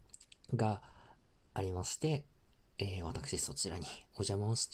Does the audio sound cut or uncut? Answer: uncut